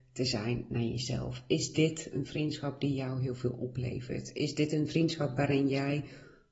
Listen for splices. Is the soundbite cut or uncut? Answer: uncut